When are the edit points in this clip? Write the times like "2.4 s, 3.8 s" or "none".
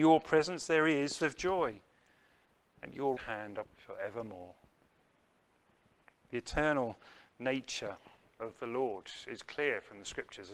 1.2 s, 3.2 s, 3.6 s